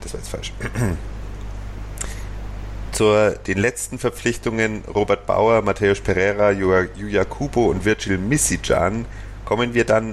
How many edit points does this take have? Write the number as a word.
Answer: zero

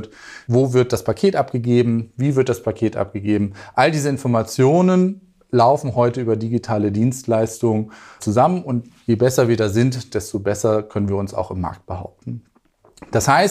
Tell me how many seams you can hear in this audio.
zero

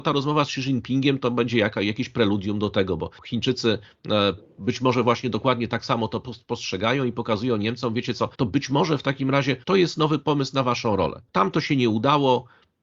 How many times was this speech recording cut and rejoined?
four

